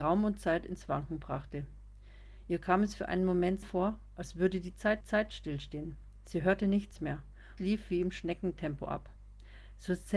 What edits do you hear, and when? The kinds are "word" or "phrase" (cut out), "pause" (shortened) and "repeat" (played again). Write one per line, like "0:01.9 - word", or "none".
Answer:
0:03.6 - word
0:05.0 - repeat
0:07.6 - phrase